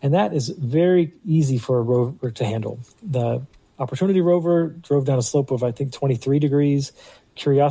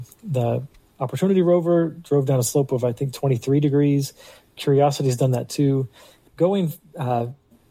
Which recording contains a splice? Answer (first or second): second